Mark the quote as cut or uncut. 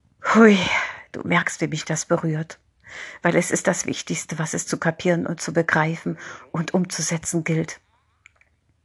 uncut